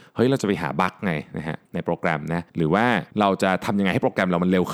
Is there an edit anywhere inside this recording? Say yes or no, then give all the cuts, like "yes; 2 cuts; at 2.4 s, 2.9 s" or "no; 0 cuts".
yes; 3 cuts; at 1.7 s, 2.5 s, 3.1 s